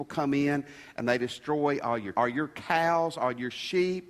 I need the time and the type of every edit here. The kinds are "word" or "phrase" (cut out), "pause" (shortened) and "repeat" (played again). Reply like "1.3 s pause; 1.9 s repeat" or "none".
2.1 s phrase